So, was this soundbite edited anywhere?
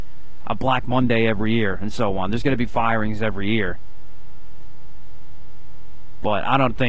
no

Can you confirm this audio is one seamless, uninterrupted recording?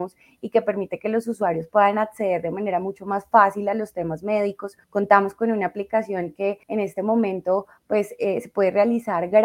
no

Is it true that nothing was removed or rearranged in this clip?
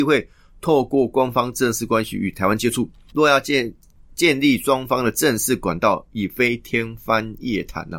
yes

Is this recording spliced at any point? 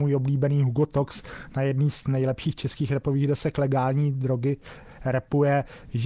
no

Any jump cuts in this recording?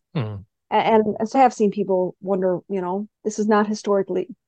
yes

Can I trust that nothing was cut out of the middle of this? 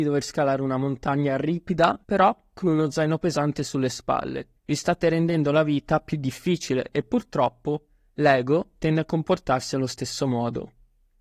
no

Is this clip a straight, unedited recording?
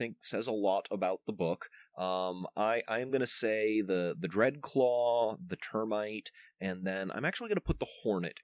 yes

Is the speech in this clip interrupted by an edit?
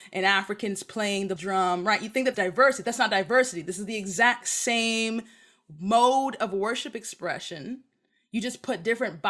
yes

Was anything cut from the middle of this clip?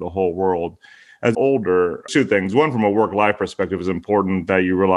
yes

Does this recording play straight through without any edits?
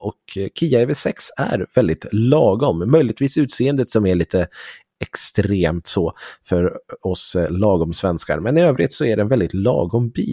yes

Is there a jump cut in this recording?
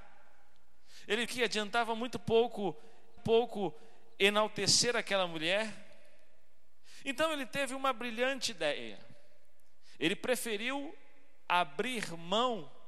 yes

